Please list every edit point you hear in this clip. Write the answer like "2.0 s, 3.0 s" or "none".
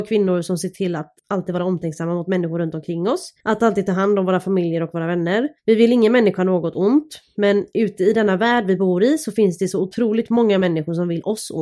1.2 s, 3.4 s, 5.6 s